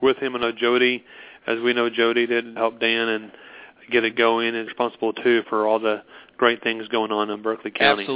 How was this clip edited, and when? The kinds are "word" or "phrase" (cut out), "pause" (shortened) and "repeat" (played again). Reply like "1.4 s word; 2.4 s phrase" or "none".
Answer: 2.6 s word; 4.7 s word; 5.4 s word